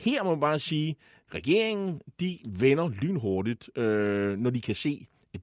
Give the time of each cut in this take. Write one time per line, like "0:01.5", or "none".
none